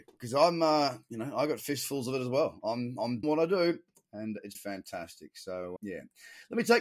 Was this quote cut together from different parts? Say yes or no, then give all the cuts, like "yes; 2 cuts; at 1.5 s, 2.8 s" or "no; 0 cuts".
yes; 3 cuts; at 3.2 s, 4.5 s, 5.8 s